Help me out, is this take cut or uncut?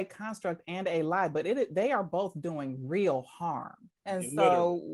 cut